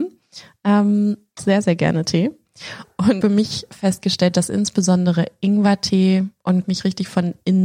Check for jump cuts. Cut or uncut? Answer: cut